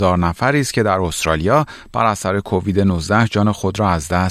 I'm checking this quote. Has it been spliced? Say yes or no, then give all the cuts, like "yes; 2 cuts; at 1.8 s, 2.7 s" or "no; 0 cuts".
no; 0 cuts